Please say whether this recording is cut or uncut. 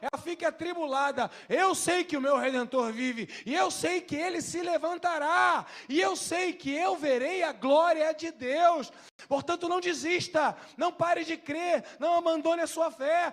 uncut